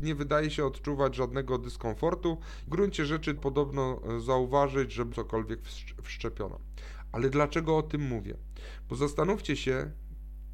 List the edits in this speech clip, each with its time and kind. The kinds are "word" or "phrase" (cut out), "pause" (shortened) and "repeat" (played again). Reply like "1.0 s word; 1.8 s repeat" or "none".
2.7 s phrase; 3.4 s word; 5.1 s word